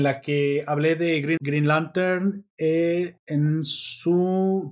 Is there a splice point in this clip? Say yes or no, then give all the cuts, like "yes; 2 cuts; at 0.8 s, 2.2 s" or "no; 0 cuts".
yes; 2 cuts; at 1.4 s, 3.2 s